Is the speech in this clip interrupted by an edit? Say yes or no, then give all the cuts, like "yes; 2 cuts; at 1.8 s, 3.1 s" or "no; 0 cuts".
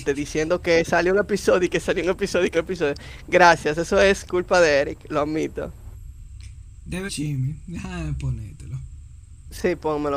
yes; 2 cuts; at 2.5 s, 7.1 s